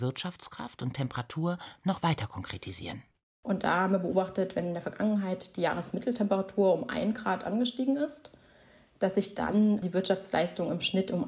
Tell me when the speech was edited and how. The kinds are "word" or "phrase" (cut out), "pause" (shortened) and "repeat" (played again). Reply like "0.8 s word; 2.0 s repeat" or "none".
none